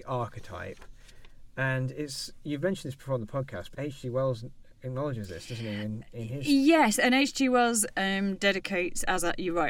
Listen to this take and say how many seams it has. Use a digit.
1